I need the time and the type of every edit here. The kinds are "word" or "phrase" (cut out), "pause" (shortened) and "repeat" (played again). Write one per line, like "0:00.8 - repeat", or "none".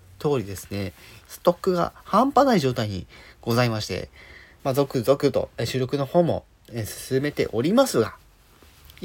0:01.2 - word
0:04.6 - word

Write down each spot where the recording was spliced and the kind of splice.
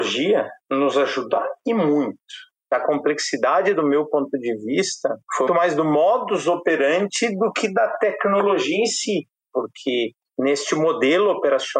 0:05.5 - word

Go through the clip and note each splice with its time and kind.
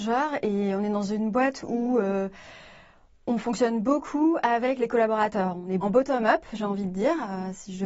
0:05.8 - word

